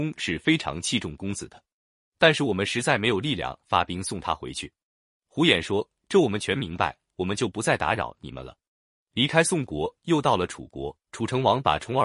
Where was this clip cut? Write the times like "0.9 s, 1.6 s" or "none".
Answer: 11.0 s